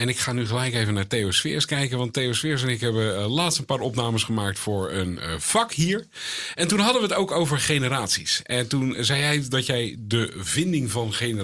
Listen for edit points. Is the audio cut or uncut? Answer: uncut